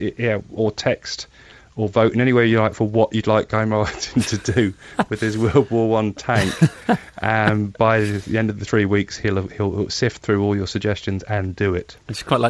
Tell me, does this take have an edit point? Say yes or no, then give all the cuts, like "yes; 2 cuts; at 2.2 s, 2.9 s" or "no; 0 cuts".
no; 0 cuts